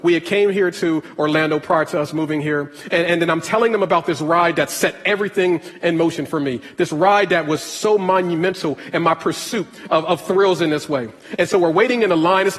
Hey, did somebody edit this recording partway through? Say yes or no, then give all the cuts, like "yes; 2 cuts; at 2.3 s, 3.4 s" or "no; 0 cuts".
no; 0 cuts